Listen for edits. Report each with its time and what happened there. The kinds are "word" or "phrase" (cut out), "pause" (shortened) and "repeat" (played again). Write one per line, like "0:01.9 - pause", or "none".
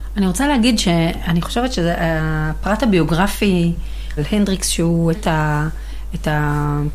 0:04.2 - word
0:05.1 - word